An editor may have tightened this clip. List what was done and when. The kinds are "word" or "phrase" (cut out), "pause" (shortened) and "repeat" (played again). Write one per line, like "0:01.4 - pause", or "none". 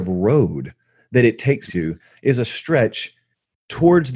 0:01.7 - word